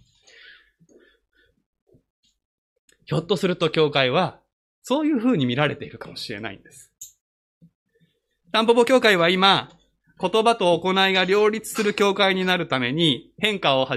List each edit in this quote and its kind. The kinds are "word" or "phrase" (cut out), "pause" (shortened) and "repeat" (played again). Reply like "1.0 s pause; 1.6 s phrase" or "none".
7.8 s pause